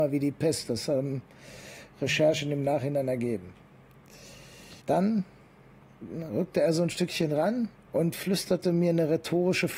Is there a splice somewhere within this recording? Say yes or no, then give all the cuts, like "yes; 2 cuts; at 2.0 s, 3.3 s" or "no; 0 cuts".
yes; 2 cuts; at 4.8 s, 7.7 s